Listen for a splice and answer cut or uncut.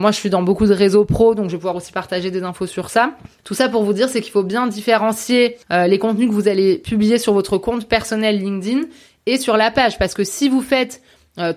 uncut